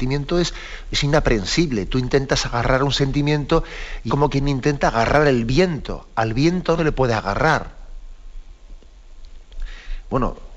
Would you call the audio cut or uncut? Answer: cut